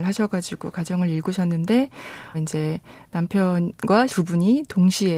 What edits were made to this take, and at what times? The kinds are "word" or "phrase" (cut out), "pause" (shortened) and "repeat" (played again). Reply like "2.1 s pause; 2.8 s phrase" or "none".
2.3 s word; 4.1 s word